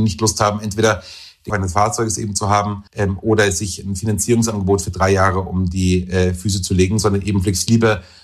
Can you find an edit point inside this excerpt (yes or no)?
yes